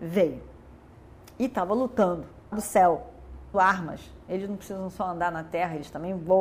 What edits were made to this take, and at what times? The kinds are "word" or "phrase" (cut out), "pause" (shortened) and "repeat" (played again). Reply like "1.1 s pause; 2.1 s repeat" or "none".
2.5 s word; 3.5 s word